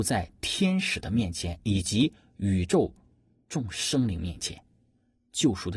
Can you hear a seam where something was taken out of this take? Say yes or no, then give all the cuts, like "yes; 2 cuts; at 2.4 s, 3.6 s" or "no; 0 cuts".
no; 0 cuts